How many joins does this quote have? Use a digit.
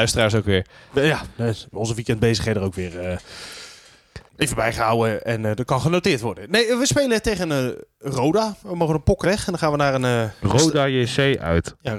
3